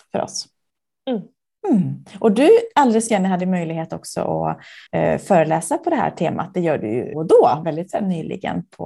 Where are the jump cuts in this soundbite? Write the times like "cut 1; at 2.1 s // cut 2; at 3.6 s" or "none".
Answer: cut 1; at 3.1 s // cut 2; at 4.9 s // cut 3; at 7.1 s // cut 4; at 7.6 s